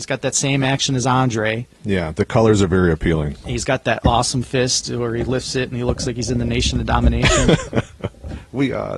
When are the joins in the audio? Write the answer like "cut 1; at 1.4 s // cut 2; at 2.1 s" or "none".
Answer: cut 1; at 1.7 s

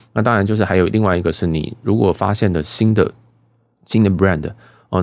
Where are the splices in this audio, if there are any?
none

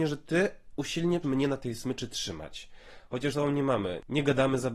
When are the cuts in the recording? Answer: cut 1; at 1.2 s // cut 2; at 3.3 s

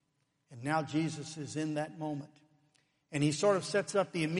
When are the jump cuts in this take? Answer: none

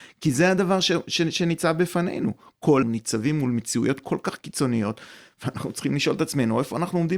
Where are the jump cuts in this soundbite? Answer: cut 1; at 2.8 s

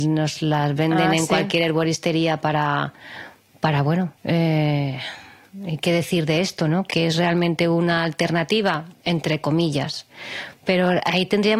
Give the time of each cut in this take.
cut 1; at 4.2 s // cut 2; at 6.9 s // cut 3; at 9.0 s

